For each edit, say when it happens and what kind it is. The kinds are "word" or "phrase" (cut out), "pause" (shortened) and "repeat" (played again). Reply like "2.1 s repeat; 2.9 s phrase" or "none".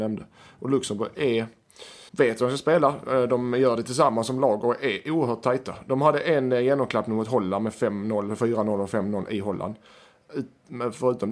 2.1 s pause